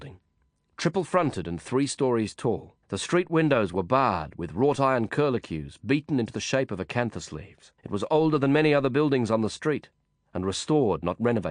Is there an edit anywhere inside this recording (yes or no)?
yes